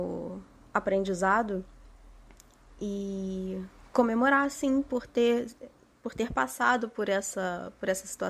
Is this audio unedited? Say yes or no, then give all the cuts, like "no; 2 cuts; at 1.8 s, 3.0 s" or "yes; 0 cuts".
yes; 0 cuts